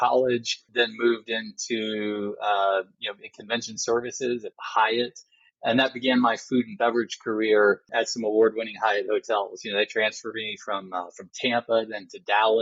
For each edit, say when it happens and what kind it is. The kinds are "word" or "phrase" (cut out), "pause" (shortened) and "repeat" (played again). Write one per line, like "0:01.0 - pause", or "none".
none